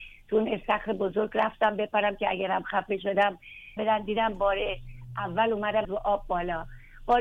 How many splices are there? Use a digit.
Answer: 2